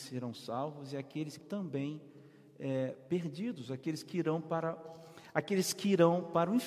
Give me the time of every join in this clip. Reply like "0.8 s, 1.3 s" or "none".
1.4 s